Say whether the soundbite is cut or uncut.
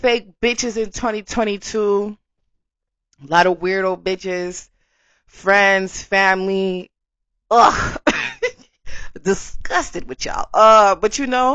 uncut